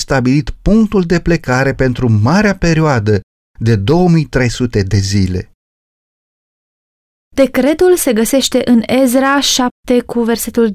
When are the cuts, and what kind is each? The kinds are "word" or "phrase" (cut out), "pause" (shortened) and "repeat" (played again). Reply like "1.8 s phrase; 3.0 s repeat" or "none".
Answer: none